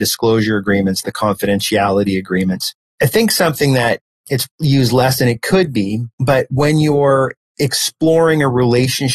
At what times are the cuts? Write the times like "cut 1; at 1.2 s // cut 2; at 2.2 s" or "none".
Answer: cut 1; at 4.5 s